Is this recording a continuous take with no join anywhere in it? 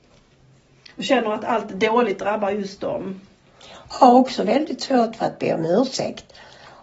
yes; 0 cuts

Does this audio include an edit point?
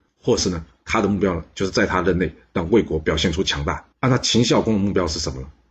yes; 1 cut; at 3.9 s

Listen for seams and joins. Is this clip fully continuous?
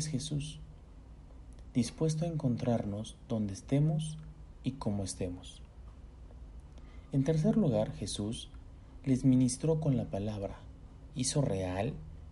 yes; 0 cuts

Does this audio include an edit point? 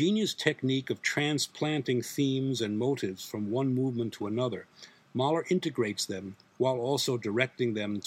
no; 0 cuts

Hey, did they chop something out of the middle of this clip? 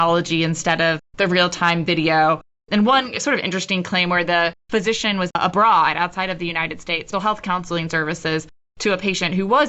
yes; 4 cuts; at 1.1 s, 4.6 s, 5.3 s, 7.1 s

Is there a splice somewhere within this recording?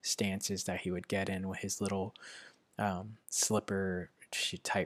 yes; 1 cut; at 3.2 s

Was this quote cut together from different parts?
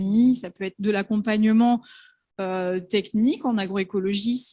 no; 0 cuts

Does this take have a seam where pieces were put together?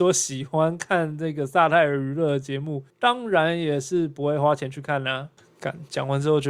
yes; 1 cut; at 2.9 s

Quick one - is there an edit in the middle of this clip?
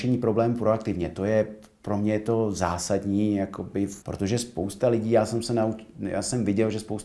yes; 1 cut; at 4.0 s

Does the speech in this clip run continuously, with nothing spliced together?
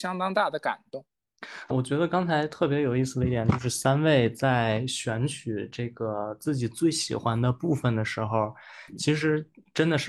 no; 1 cut; at 1.7 s

